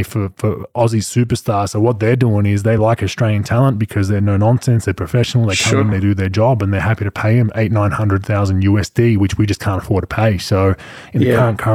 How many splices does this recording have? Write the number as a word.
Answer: zero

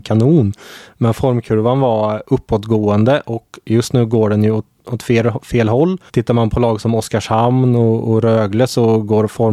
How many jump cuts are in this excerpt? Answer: one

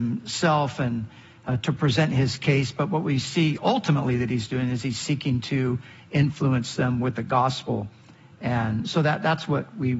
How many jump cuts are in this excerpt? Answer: zero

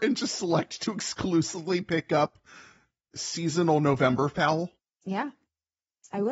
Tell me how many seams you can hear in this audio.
zero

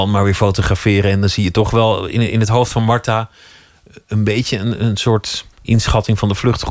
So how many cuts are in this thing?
one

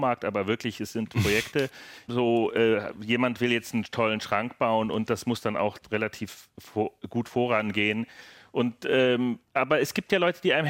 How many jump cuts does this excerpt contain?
one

